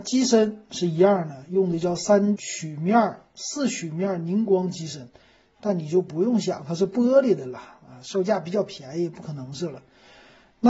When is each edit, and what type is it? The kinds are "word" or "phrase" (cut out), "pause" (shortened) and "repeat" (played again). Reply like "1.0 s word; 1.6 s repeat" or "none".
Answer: 2.4 s word